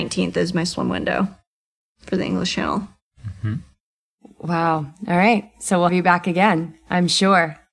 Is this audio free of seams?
no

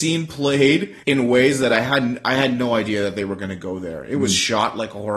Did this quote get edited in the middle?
yes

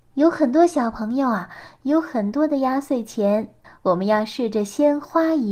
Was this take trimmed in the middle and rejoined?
yes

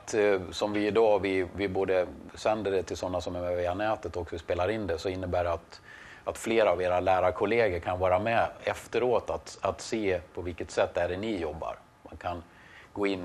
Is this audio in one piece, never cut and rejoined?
yes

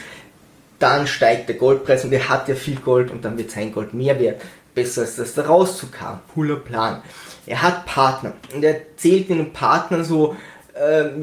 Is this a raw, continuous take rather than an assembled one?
no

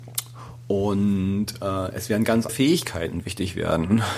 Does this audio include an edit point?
yes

